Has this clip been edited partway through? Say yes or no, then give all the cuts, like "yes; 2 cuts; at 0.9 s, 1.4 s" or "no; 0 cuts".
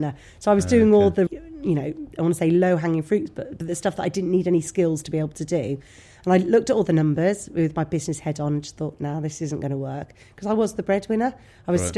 yes; 1 cut; at 1.3 s